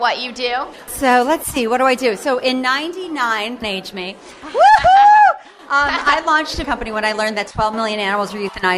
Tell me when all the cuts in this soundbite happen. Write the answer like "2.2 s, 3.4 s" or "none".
3.6 s, 6.6 s